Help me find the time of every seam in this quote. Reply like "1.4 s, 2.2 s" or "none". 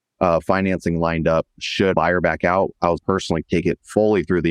1.9 s, 3.0 s, 3.4 s